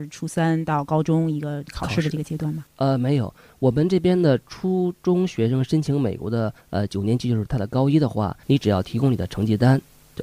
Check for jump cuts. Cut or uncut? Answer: cut